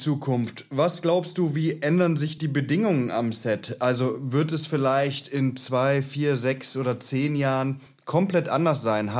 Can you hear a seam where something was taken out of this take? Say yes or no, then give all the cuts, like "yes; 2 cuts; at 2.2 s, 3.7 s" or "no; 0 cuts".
no; 0 cuts